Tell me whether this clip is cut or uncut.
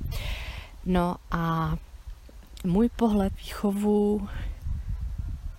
cut